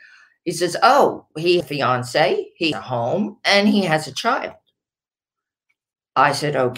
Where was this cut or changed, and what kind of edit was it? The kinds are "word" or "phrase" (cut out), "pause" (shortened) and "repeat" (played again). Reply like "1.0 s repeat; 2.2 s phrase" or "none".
1.6 s word; 2.7 s word